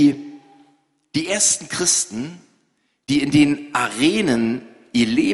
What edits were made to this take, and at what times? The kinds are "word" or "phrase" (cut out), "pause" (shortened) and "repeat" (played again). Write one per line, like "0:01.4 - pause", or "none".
none